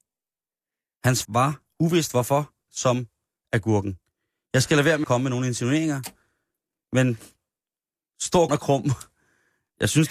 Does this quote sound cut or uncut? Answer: cut